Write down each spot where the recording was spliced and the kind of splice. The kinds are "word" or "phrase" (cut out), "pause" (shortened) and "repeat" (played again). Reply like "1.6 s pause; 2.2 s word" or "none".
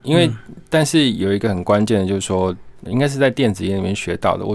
2.9 s word